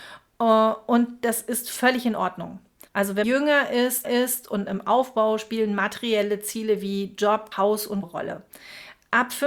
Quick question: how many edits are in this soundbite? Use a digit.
5